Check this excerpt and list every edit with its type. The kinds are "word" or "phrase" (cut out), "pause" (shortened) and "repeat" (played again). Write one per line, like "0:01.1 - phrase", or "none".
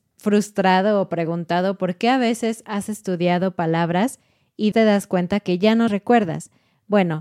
0:04.7 - word
0:05.9 - word

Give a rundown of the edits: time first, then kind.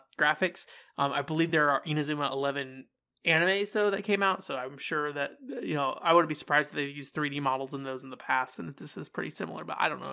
none

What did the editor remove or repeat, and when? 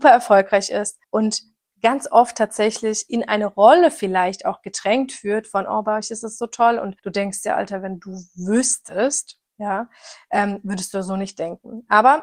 0:01.0 - pause
0:07.0 - pause

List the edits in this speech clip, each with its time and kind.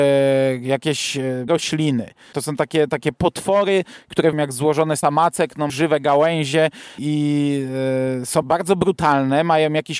0:01.5 - word
0:02.3 - word
0:04.3 - word
0:05.0 - word
0:05.7 - word
0:07.0 - word
0:08.4 - word

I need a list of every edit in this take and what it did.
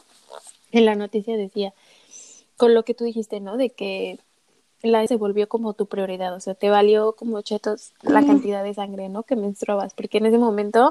0:05.1 - word

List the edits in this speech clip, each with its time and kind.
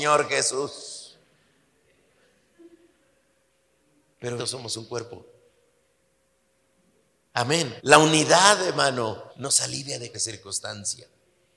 0:04.4 - word
0:07.8 - pause
0:09.3 - pause
0:10.1 - word

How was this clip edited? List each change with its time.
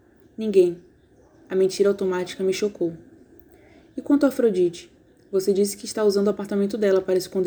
none

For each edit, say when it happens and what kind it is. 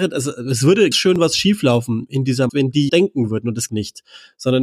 0:00.9 - word
0:02.5 - word
0:02.9 - phrase
0:03.7 - phrase

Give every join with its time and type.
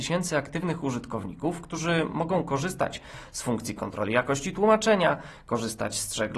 none

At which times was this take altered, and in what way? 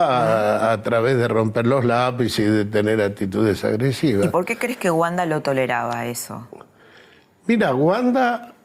none

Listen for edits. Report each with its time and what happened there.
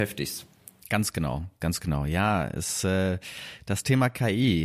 none

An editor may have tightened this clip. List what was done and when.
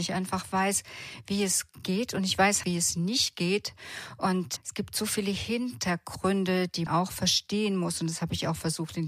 0:02.6 - phrase
0:04.6 - word
0:06.9 - word

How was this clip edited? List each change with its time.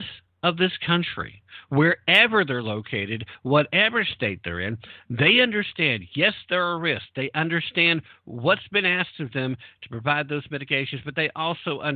none

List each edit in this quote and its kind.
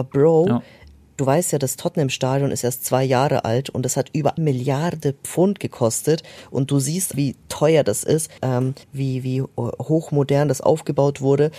0:04.4 - word
0:07.1 - word
0:08.4 - word
0:08.8 - pause

